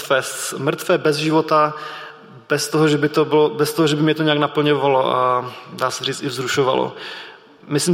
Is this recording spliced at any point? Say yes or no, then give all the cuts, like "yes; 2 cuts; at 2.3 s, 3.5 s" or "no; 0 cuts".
no; 0 cuts